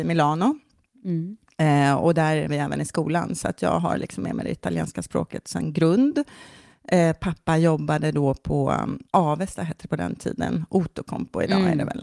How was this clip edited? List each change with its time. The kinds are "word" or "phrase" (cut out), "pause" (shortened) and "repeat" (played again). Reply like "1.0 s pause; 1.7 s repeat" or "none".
2.5 s word; 9.1 s pause

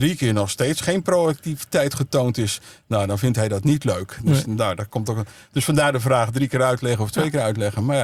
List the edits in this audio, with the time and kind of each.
none

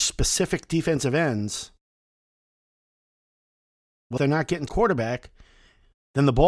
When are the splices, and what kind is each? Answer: 4.2 s word; 4.7 s word

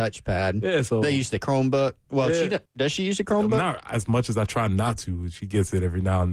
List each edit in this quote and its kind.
2.7 s pause

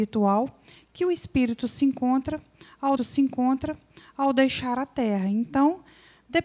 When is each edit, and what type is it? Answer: 3.0 s repeat

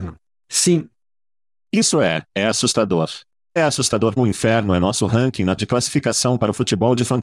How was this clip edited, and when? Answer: 2.3 s pause; 3.6 s phrase; 4.2 s word; 5.6 s word

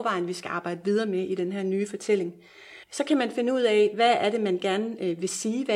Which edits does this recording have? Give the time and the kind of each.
2.8 s pause

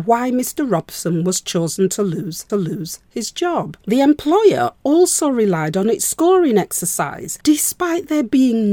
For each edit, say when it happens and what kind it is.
2.5 s repeat; 3.8 s pause; 7.4 s pause

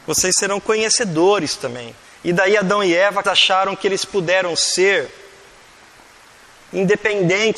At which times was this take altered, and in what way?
2.0 s pause; 3.2 s phrase

